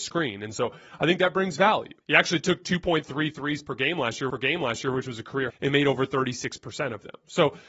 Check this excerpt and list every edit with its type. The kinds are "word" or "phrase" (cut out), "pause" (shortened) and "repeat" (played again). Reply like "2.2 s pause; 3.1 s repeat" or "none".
2.0 s pause; 4.3 s repeat; 5.5 s word